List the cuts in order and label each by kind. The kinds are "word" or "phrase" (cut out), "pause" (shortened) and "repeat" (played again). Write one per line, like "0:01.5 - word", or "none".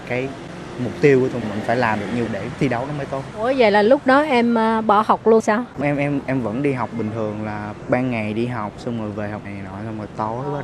0:01.4 - word
0:02.3 - word
0:03.3 - word
0:05.4 - word
0:05.8 - word
0:09.4 - word